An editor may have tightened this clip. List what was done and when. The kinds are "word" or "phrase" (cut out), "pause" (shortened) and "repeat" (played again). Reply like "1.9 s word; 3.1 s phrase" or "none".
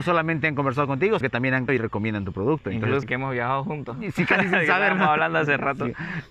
1.2 s word; 1.7 s word; 3.0 s word